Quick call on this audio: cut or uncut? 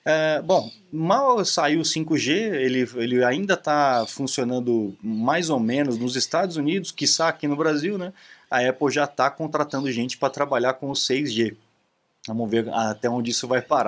uncut